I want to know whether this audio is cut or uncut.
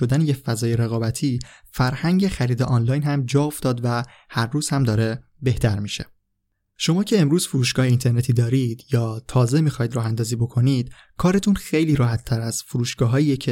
uncut